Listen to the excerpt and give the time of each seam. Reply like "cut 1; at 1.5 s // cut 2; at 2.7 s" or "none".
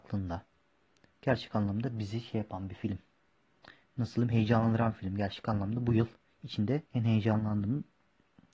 cut 1; at 6.9 s